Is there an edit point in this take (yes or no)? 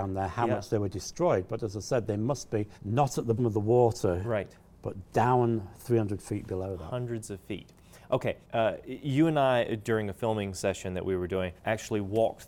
yes